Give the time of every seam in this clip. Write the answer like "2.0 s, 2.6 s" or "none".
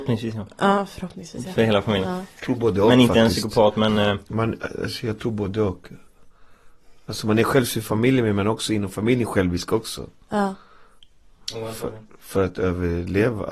none